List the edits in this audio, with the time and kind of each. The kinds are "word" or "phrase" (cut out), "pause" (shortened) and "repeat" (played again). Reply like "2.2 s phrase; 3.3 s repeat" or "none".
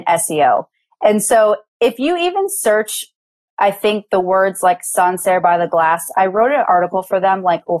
none